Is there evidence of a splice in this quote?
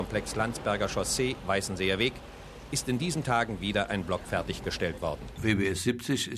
no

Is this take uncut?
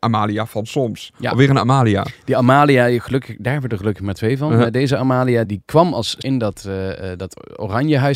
no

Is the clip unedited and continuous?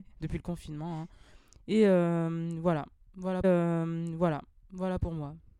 no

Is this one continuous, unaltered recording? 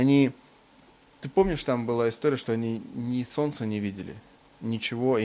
yes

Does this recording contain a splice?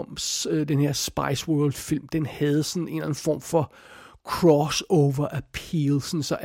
no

